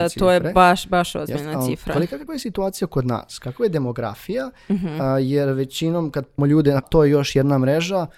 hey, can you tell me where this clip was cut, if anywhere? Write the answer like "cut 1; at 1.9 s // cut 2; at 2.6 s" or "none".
cut 1; at 2.3 s // cut 2; at 6.4 s // cut 3; at 6.8 s